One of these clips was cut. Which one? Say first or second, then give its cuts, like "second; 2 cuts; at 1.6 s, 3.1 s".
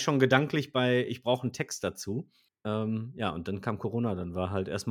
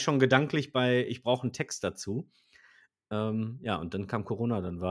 first; 1 cut; at 2.5 s